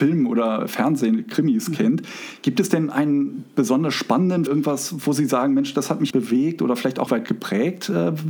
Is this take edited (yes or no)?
yes